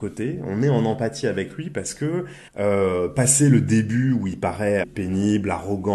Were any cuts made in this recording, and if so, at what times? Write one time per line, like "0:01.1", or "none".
0:02.5
0:04.8